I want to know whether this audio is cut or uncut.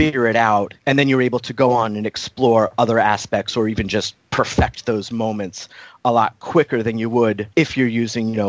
uncut